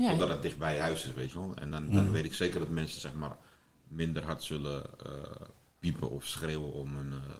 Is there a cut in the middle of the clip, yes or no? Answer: no